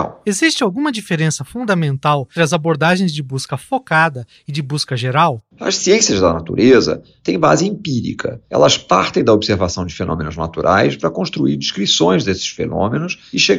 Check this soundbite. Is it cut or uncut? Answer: cut